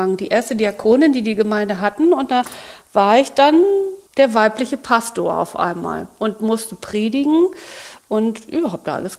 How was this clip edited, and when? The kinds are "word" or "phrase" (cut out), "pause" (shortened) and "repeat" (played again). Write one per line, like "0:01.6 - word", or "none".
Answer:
0:04.1 - pause